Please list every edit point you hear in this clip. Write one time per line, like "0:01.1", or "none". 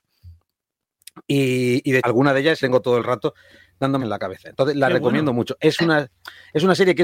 0:02.0
0:02.6
0:04.0